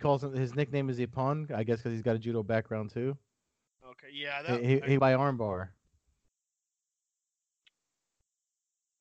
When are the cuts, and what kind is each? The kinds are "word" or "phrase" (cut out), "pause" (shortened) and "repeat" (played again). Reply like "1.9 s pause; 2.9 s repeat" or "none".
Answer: 5.0 s word